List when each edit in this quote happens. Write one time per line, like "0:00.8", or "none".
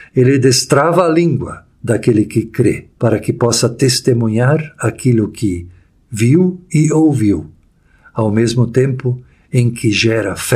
0:01.7
0:02.9